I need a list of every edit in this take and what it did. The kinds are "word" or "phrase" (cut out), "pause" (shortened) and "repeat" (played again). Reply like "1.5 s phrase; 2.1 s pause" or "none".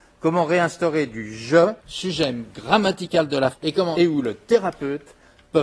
1.8 s pause; 3.5 s word; 3.9 s word